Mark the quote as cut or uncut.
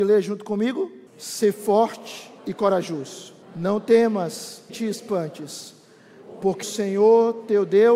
cut